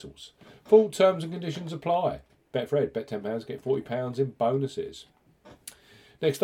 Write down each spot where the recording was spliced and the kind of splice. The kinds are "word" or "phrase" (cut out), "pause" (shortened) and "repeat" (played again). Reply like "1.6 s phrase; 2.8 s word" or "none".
none